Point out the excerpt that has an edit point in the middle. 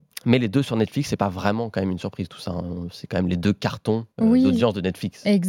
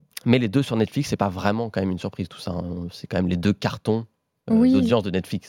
first; 1 cut; at 4.1 s

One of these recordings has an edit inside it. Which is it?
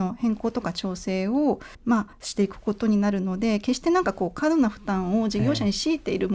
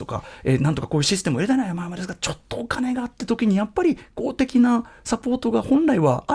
first; 2 cuts; at 1.7 s, 2.1 s

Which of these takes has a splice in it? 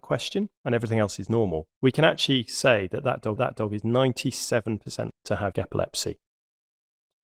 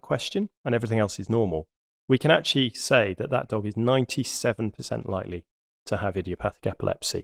first; 4 cuts; at 1.7 s, 3.4 s, 5.1 s, 5.5 s

